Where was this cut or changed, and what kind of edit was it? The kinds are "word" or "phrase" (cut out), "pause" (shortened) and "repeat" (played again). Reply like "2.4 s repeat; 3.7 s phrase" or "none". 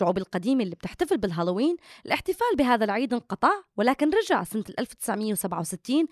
none